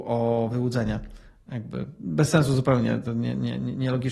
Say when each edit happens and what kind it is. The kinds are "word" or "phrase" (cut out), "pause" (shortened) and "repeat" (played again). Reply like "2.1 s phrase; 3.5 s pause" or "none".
none